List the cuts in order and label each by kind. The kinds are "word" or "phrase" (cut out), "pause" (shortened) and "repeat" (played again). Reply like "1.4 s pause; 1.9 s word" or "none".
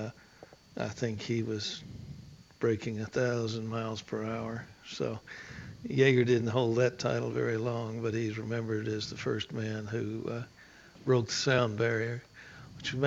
none